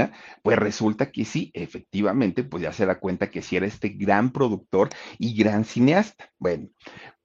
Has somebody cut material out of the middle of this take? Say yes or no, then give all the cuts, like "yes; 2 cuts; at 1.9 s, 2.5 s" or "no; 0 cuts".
no; 0 cuts